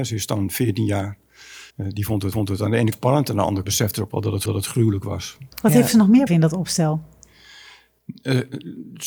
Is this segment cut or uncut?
cut